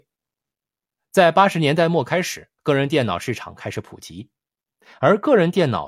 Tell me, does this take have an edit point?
yes; 1 cut; at 2.6 s

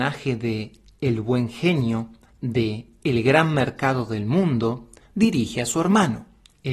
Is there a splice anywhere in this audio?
no; 0 cuts

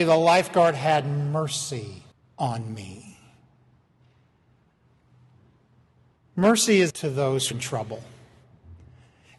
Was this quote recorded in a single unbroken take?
no; 3 cuts; at 2.1 s, 6.9 s, 7.5 s

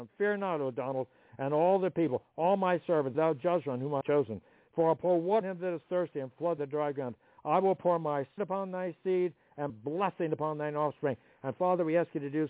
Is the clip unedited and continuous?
no; 6 cuts; at 3.1 s, 4.0 s, 5.4 s, 6.6 s, 8.4 s, 9.7 s

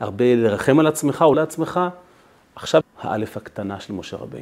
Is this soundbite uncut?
no; 2 cuts; at 1.3 s, 2.8 s

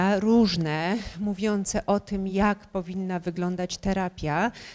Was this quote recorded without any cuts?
yes; 0 cuts

